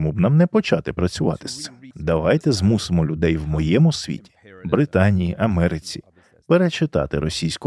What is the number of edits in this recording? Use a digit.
1